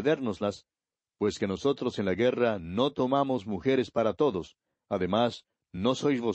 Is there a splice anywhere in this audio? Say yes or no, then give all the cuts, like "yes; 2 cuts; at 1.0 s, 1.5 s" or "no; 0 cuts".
no; 0 cuts